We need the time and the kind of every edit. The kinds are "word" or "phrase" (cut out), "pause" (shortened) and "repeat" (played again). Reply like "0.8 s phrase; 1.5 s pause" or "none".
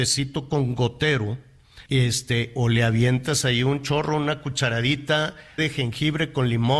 1.9 s pause; 5.6 s phrase

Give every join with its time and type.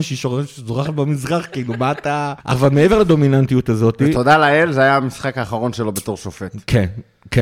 2.4 s pause

